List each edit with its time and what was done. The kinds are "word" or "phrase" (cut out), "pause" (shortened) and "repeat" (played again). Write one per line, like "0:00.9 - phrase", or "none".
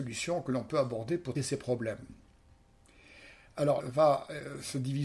0:01.4 - word
0:03.8 - phrase